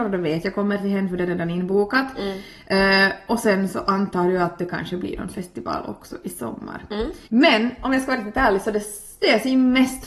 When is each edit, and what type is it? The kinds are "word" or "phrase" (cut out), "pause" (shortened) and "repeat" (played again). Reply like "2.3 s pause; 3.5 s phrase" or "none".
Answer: 7.2 s pause